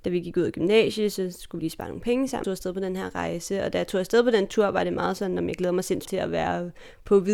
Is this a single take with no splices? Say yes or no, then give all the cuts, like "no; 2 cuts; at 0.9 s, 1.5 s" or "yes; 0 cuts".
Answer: no; 3 cuts; at 1.6 s, 2.4 s, 6.0 s